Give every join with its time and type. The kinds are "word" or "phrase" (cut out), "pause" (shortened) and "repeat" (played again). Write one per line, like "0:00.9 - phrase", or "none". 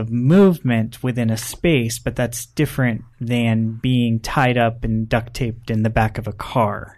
none

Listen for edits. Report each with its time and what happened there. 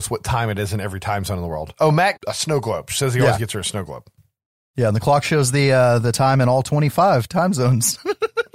0:02.2 - phrase

